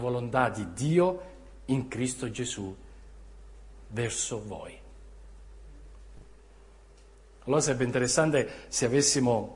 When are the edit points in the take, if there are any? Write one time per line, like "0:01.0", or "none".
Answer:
none